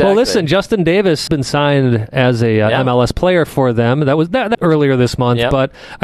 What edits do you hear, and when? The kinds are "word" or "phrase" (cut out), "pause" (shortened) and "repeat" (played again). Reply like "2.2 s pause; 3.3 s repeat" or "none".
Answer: 1.3 s word; 4.5 s phrase